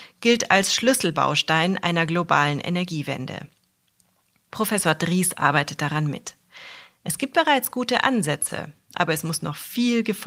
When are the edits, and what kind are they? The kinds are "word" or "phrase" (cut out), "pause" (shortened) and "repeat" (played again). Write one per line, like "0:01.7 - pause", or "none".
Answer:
none